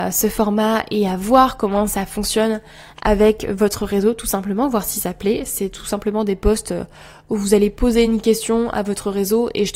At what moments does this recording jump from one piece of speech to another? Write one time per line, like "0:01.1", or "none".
none